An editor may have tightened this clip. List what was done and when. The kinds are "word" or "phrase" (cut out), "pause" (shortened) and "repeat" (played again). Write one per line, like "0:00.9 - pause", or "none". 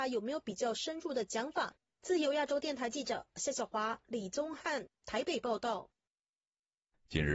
none